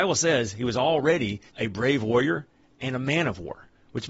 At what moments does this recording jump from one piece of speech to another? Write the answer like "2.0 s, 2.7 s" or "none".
1.5 s